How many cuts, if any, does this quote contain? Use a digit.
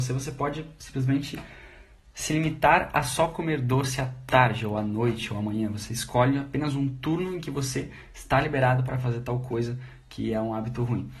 0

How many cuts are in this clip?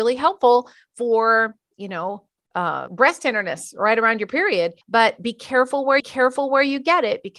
3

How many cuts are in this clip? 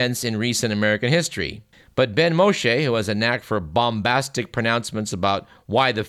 1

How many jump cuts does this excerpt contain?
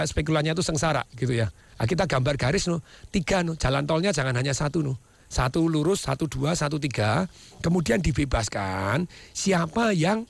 0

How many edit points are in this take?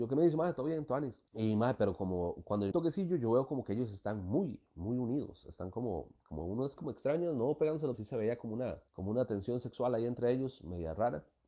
5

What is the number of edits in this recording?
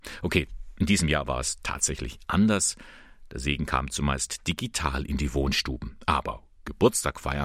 0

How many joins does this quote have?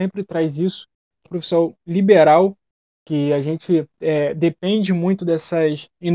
2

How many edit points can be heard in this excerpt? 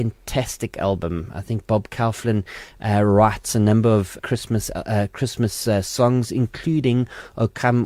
1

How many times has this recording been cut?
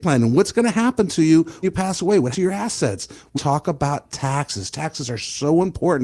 3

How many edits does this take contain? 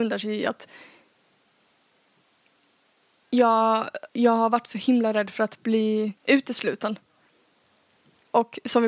2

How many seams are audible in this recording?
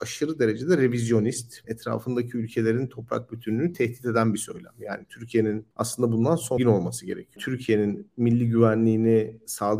3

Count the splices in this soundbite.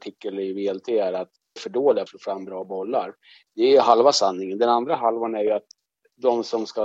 2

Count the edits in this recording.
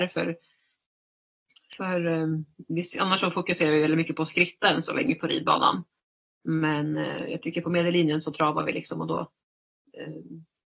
0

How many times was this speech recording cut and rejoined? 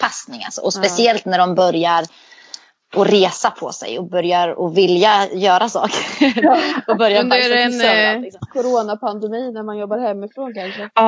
0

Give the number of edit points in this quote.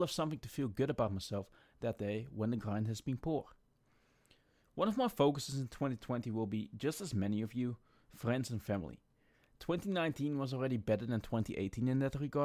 0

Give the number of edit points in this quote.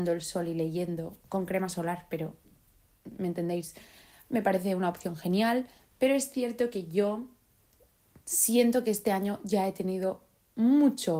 0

